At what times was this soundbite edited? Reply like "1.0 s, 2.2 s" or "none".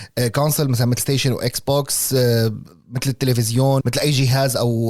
1.0 s, 3.8 s